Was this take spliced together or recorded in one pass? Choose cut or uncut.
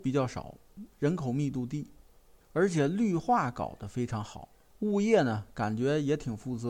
cut